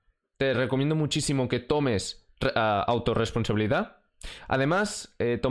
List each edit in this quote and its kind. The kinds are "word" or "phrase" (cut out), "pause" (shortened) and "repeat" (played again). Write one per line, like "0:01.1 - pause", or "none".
none